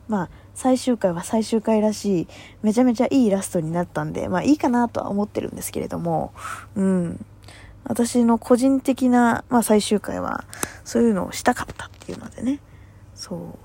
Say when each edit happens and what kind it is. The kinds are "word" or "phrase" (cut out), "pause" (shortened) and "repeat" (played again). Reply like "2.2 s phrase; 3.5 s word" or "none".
none